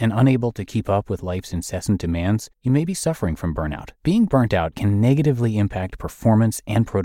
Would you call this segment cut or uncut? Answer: cut